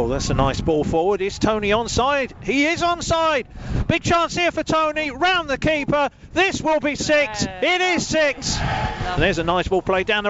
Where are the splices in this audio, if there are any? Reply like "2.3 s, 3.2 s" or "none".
none